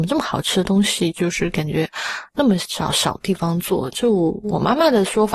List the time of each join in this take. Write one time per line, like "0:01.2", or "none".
0:02.3